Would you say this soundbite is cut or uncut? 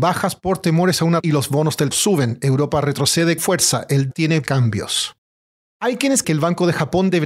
cut